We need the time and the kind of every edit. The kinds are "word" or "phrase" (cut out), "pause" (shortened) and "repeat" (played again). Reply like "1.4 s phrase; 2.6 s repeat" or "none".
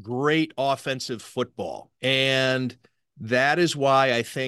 2.0 s pause